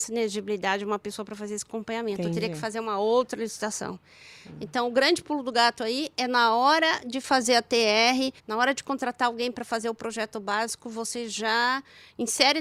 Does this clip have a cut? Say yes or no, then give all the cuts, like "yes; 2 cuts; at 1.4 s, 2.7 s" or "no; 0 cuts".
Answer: yes; 1 cut; at 8.4 s